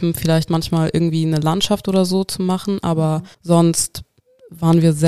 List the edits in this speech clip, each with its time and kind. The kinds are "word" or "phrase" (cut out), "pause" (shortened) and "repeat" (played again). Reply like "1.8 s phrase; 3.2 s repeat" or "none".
3.3 s pause